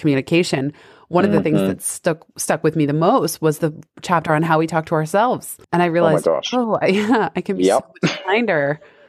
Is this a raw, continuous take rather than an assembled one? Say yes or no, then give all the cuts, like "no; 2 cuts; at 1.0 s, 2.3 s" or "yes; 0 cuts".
no; 2 cuts; at 3.9 s, 5.6 s